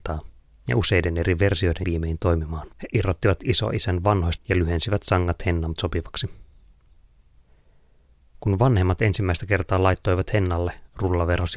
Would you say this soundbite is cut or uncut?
cut